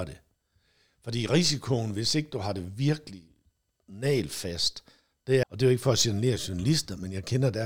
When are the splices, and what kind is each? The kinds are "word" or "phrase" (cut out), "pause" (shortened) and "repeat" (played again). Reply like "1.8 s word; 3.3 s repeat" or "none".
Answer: 5.4 s word